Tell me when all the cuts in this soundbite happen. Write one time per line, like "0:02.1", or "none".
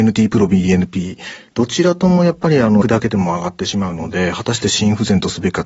0:02.8